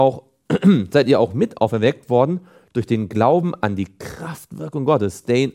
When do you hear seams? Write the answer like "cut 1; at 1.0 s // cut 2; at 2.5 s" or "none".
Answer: none